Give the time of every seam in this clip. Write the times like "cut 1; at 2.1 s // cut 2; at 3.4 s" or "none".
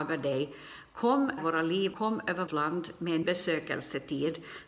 cut 1; at 1.4 s // cut 2; at 1.9 s // cut 3; at 2.5 s // cut 4; at 3.2 s